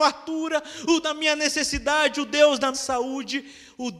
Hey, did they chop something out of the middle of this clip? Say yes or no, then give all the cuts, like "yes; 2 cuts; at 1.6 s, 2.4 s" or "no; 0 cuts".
yes; 2 cuts; at 1.0 s, 2.7 s